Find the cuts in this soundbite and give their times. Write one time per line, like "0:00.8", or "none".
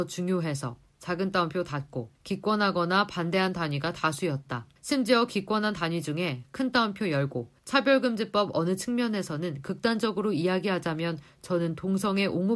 0:02.1
0:04.8
0:07.6